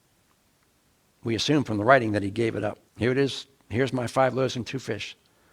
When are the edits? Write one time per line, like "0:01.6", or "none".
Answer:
0:02.9